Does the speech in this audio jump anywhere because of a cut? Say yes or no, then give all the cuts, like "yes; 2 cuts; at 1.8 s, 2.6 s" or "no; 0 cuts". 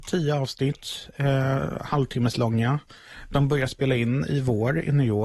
no; 0 cuts